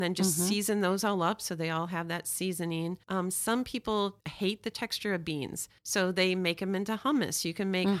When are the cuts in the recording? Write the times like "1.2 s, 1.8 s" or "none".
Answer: 3.0 s, 4.2 s, 5.8 s